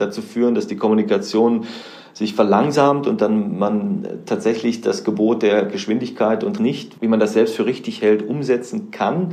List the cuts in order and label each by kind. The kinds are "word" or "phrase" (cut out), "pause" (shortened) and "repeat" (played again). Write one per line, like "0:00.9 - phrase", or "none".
0:06.6 - word